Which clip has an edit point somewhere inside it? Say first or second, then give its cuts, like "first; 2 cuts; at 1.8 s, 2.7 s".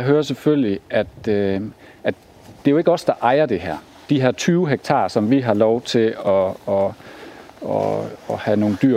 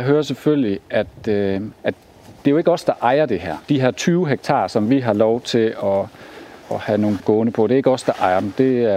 second; 5 cuts; at 1.8 s, 3.6 s, 5.8 s, 6.6 s, 7.2 s